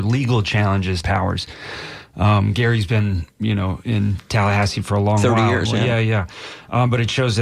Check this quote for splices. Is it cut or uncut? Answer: cut